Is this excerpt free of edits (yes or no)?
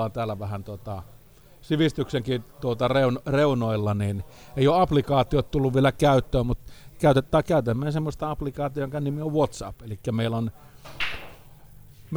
yes